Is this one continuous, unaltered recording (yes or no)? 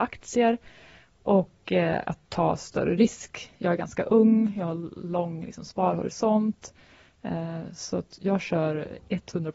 yes